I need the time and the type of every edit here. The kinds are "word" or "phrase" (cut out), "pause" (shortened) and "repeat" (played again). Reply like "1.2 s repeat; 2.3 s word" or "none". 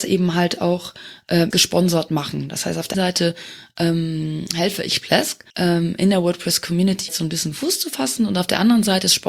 1.5 s word; 2.9 s word; 5.5 s pause; 7.1 s word